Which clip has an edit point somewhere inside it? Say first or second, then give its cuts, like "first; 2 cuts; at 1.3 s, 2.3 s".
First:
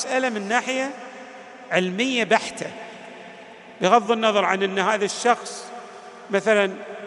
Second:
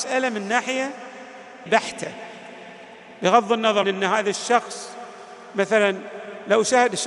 second; 2 cuts; at 1.7 s, 3.8 s